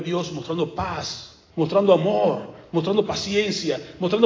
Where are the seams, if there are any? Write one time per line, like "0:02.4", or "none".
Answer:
0:01.5

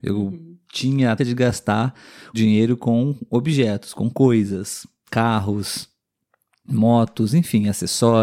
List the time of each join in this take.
0:01.2
0:02.3
0:05.1

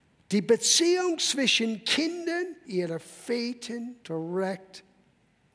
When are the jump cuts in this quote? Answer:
0:02.6
0:04.0

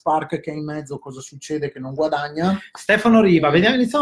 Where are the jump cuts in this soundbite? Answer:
none

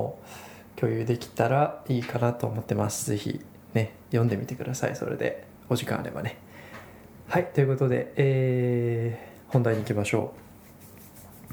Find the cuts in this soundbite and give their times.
0:05.5
0:09.4

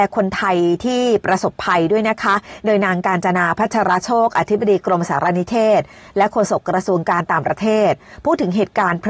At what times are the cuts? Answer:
none

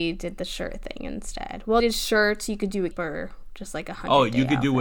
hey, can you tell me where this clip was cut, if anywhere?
0:01.8
0:02.9

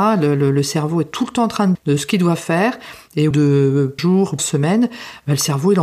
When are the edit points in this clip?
0:01.7
0:03.3
0:04.0
0:04.4

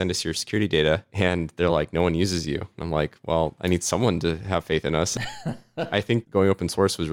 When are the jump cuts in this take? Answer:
none

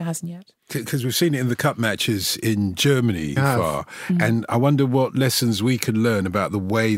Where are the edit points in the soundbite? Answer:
0:03.4

